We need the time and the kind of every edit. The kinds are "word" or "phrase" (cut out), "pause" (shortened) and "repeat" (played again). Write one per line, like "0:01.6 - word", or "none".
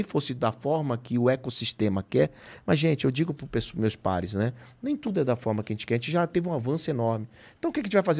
none